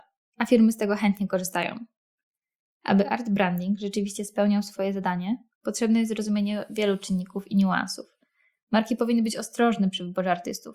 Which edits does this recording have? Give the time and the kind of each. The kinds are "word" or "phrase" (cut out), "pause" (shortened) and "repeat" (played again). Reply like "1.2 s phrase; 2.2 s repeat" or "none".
none